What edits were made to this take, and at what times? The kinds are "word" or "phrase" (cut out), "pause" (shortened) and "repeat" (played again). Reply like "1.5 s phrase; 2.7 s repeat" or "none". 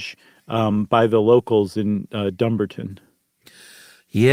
none